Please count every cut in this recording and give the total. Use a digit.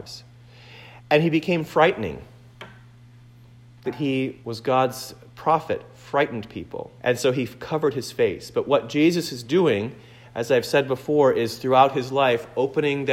4